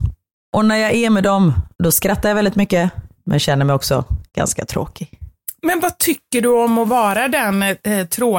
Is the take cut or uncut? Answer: cut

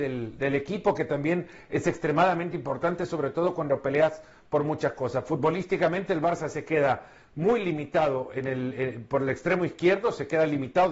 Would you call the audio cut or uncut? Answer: uncut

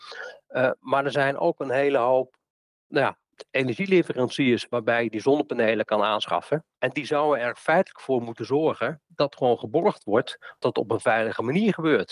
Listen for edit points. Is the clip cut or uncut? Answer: cut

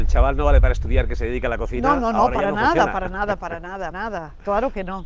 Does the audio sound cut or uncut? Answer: cut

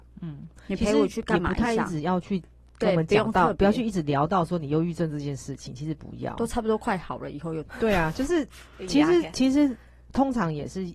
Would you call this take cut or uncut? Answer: uncut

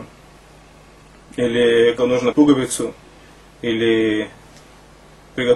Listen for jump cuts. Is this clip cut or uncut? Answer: cut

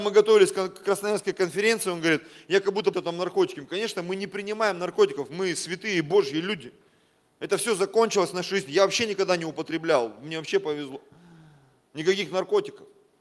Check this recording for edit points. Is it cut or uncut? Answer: cut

